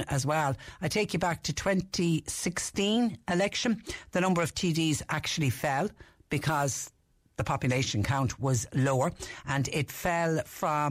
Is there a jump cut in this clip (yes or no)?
no